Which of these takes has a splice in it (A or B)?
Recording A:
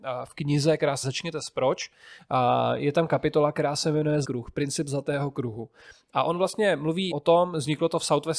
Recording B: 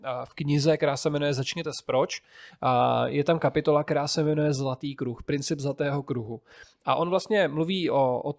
A